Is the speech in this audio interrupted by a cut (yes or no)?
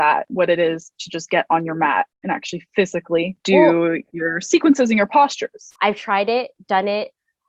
yes